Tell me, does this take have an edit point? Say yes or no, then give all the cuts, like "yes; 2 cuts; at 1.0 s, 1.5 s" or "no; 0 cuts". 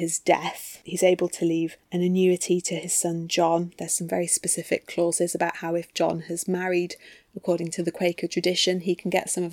no; 0 cuts